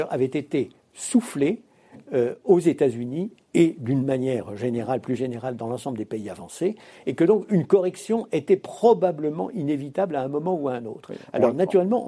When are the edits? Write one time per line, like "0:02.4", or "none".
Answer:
none